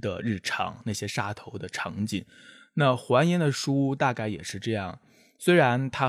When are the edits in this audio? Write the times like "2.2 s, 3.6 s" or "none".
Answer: none